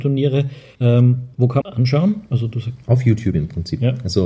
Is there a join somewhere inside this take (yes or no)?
yes